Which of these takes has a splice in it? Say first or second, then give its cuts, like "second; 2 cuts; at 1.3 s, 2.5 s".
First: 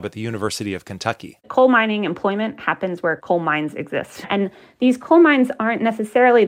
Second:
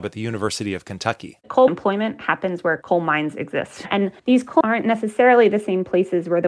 second; 3 cuts; at 1.7 s, 4.2 s, 4.6 s